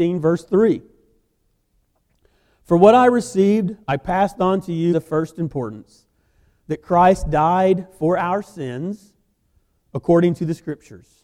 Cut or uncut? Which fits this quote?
cut